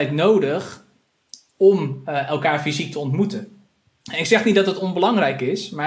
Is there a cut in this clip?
no; 0 cuts

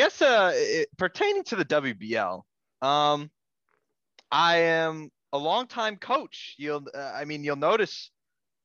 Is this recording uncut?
no; 1 cut; at 2.6 s

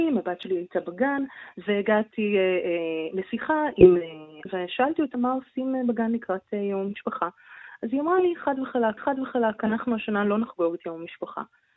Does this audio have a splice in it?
yes; 3 cuts; at 4.5 s, 5.1 s, 9.0 s

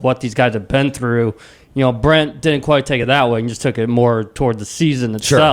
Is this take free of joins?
yes; 0 cuts

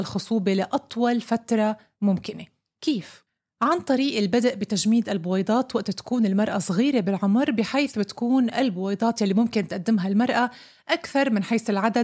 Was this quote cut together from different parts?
no; 0 cuts

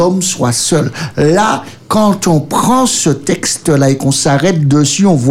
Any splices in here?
no; 0 cuts

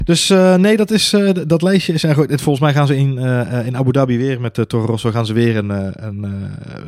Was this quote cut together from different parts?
no; 0 cuts

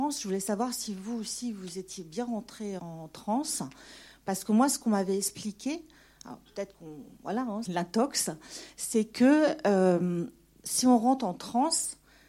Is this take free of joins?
no; 2 cuts; at 2.8 s, 7.6 s

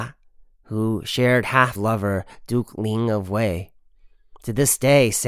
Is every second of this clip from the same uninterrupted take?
no; 1 cut; at 1.8 s

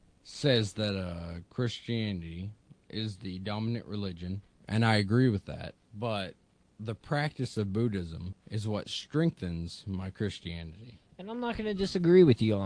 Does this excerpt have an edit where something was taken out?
no; 0 cuts

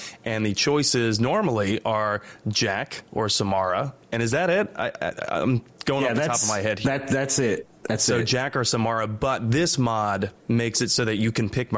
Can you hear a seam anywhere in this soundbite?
yes; 4 cuts; at 3.1 s, 4.0 s, 7.8 s, 10.4 s

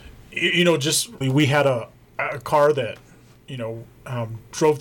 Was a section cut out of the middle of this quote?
yes; 1 cut; at 1.2 s

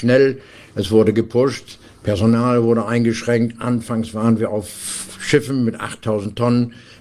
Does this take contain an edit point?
no; 0 cuts

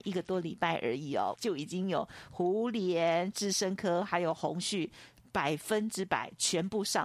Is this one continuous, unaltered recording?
no; 1 cut; at 1.3 s

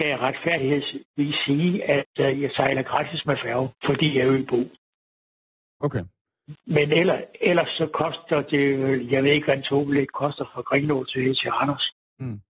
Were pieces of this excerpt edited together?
yes; 2 cuts; at 3.8 s, 6.6 s

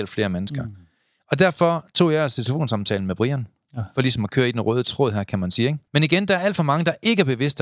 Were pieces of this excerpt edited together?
yes; 1 cut; at 5.9 s

